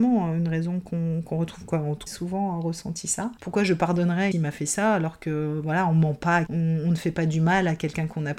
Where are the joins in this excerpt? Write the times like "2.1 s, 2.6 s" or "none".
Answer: 2.1 s, 3.4 s, 4.3 s, 6.5 s